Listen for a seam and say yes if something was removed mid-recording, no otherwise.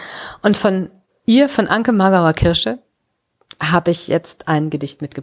no